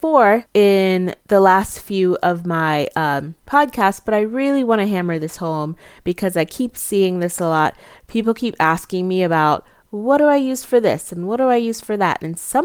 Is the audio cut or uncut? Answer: uncut